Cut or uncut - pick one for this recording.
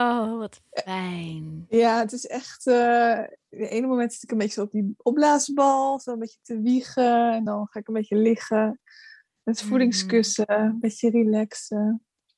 uncut